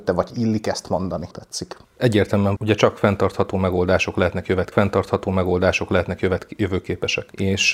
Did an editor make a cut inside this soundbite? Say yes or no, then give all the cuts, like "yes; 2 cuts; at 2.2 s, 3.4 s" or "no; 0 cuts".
yes; 3 cuts; at 1.3 s, 2.6 s, 4.7 s